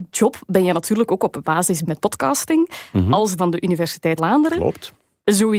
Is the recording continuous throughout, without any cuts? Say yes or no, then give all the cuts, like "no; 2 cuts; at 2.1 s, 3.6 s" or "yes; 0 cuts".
no; 4 cuts; at 1.4 s, 1.9 s, 3.4 s, 4.2 s